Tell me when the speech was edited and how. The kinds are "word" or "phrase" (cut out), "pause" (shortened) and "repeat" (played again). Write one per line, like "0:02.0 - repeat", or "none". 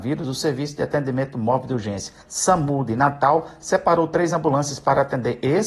0:02.2 - pause